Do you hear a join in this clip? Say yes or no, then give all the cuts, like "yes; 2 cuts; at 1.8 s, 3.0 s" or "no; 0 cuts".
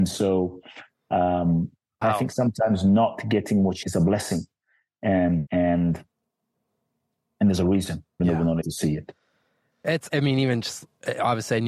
yes; 6 cuts; at 2.0 s, 3.8 s, 5.5 s, 8.2 s, 8.6 s, 10.1 s